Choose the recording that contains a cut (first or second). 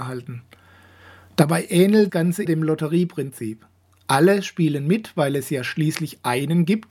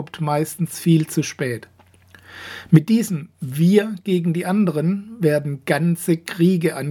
first